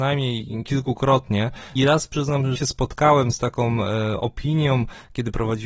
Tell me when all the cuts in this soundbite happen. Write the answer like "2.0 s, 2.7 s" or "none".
1.8 s, 2.6 s